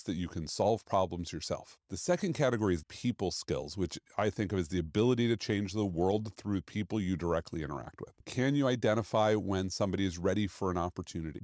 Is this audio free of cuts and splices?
no; 1 cut; at 2.8 s

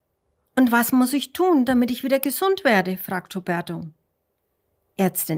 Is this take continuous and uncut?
yes; 0 cuts

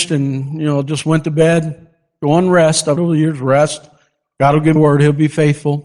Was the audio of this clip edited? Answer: yes; 2 cuts; at 3.0 s, 4.8 s

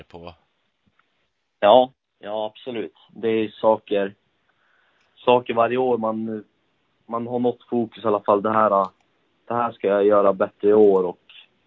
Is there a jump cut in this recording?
no; 0 cuts

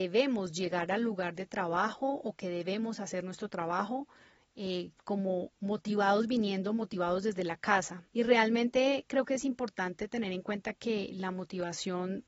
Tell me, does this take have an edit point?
yes; 2 cuts; at 5.0 s, 8.1 s

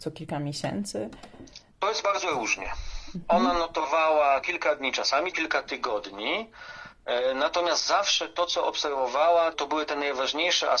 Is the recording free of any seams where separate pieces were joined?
no; 3 cuts; at 4.4 s, 5.3 s, 9.5 s

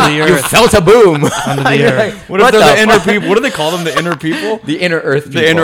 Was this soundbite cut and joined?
no; 0 cuts

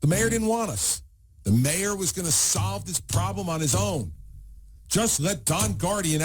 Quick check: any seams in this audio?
no; 0 cuts

